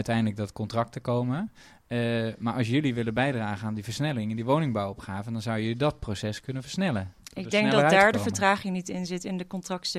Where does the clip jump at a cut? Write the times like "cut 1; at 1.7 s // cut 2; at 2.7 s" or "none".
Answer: none

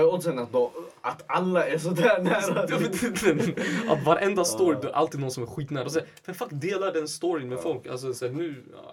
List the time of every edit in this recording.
none

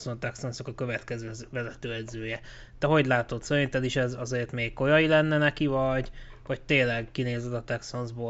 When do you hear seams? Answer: none

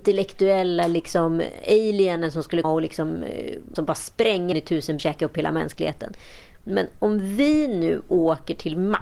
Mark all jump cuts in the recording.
cut 1; at 2.6 s // cut 2; at 3.7 s // cut 3; at 4.5 s // cut 4; at 5.0 s

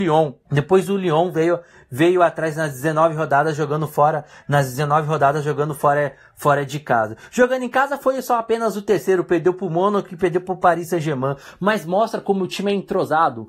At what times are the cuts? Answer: none

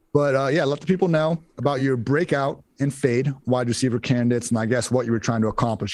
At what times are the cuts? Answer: none

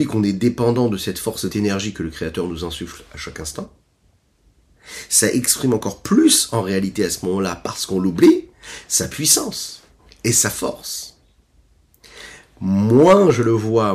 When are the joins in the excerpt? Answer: cut 1; at 1.5 s // cut 2; at 10.0 s

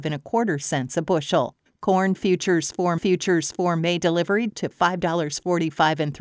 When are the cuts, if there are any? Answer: cut 1; at 1.7 s // cut 2; at 3.0 s // cut 3; at 4.5 s

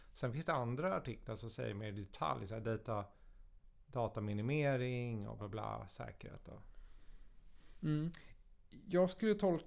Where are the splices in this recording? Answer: cut 1; at 5.4 s

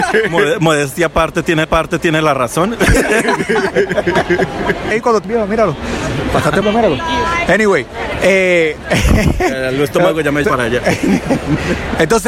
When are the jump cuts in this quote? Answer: cut 1; at 1.6 s // cut 2; at 4.9 s // cut 3; at 5.2 s // cut 4; at 6.6 s // cut 5; at 10.4 s

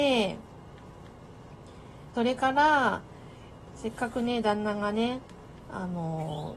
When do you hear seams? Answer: cut 1; at 2.1 s

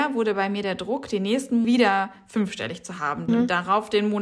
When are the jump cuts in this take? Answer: cut 1; at 1.6 s // cut 2; at 3.3 s

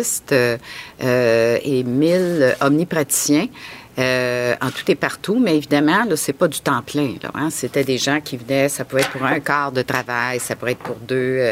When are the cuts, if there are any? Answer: none

